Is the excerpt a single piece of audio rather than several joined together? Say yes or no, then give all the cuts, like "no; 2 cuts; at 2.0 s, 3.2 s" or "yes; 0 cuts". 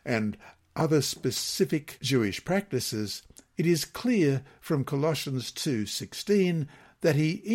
yes; 0 cuts